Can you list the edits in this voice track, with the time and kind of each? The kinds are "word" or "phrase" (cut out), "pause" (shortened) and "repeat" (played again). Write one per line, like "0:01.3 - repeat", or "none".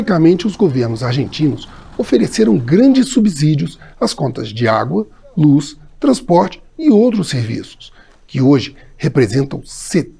none